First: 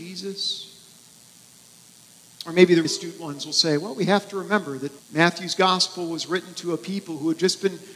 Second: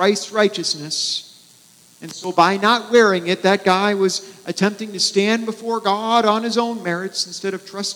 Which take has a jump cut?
first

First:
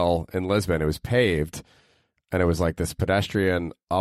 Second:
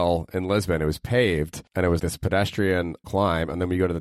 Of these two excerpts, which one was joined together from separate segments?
second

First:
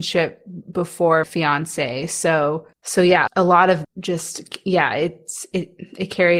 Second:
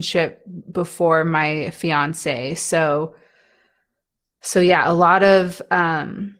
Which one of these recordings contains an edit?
first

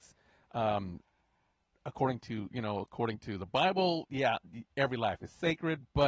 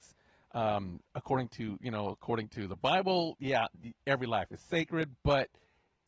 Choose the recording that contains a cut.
second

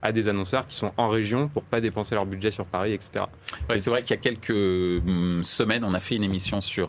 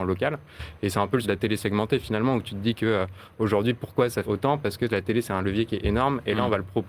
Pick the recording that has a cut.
second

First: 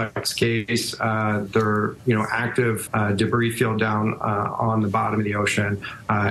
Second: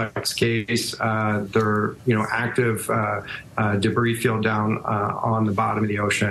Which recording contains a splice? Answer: first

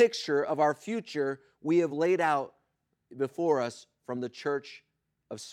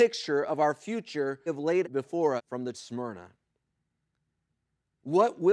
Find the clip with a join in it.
second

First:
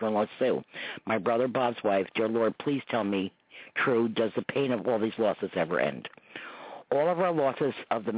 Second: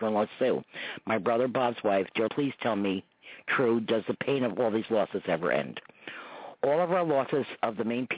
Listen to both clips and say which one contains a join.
second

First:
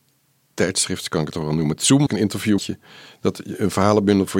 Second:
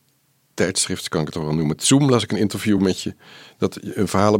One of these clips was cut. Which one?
first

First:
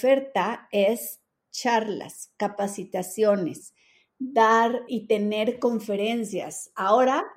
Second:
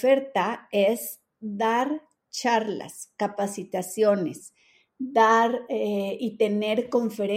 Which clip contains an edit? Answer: first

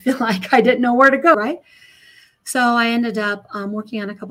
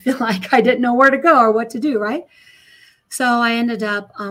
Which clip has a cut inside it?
first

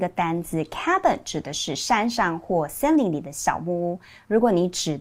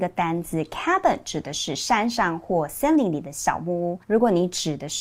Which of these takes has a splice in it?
second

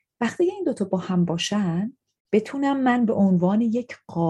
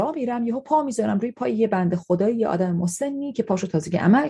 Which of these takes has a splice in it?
first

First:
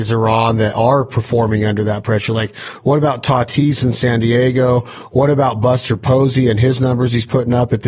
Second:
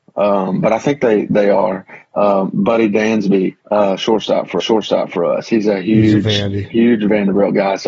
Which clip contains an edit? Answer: second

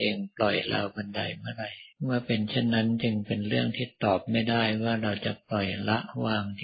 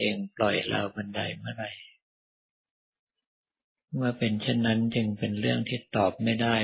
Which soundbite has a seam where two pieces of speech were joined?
first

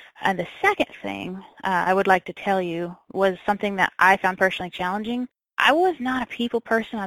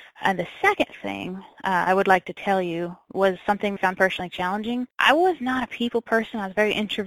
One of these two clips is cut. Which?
second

